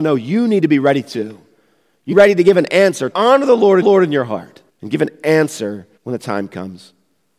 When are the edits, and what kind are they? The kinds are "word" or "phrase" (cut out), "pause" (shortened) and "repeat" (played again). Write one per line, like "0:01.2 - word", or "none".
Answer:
0:02.1 - phrase
0:03.1 - word
0:03.8 - repeat
0:04.7 - pause
0:06.0 - pause